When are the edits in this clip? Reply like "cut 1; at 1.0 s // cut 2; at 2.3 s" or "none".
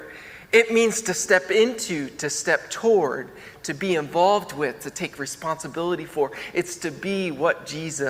none